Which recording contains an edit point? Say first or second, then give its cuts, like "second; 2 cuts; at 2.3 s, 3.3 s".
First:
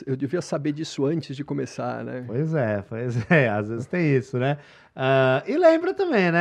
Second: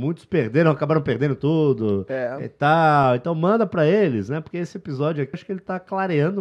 second; 1 cut; at 5.3 s